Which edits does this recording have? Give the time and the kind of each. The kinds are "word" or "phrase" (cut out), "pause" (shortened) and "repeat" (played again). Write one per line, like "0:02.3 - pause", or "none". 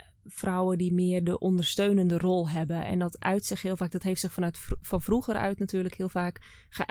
none